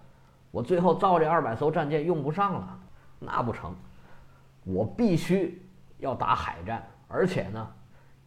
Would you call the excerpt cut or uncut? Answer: uncut